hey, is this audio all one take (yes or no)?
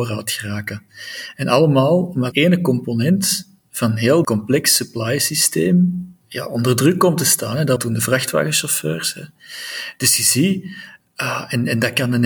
no